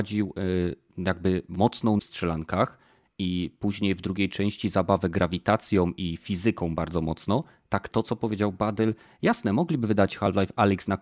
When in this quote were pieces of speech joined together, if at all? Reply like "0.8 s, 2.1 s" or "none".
2.0 s, 7.9 s